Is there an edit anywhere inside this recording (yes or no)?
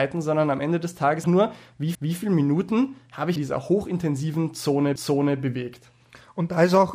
yes